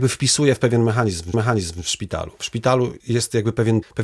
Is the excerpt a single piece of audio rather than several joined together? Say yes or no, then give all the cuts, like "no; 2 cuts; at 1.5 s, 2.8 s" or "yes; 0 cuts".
no; 2 cuts; at 1.3 s, 3.0 s